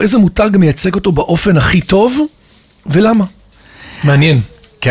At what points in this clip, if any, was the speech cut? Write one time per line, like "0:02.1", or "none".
none